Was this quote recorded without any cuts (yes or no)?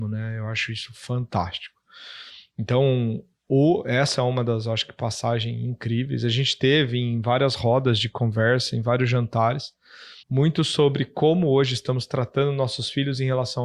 no